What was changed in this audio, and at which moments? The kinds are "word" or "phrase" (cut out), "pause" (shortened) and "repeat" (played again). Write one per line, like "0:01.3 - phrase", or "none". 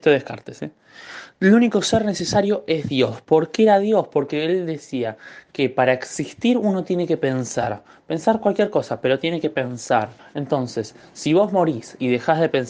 0:10.2 - pause